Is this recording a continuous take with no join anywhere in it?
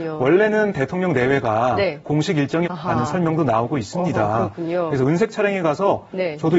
no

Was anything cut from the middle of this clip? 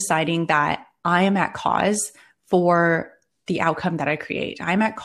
no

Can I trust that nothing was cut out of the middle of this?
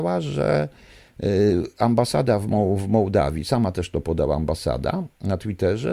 yes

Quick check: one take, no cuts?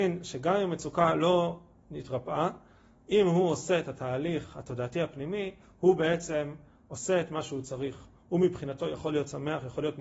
yes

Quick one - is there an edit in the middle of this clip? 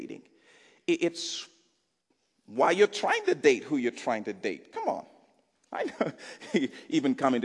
no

